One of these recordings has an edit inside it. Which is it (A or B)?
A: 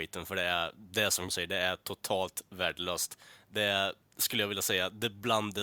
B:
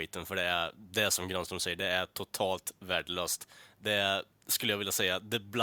A